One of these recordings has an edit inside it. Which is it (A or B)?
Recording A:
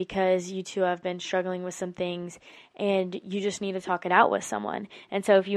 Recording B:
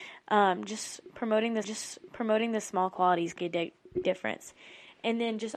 B